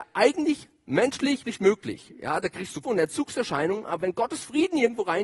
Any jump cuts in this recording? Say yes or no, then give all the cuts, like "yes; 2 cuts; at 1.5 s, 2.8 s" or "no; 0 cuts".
yes; 2 cuts; at 1.4 s, 2.8 s